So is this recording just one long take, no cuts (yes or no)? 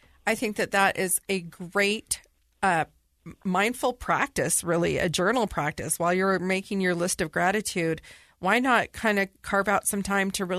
yes